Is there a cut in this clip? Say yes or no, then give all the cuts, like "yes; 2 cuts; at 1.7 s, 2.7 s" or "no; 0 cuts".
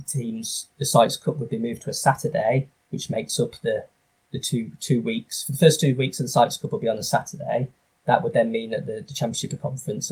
no; 0 cuts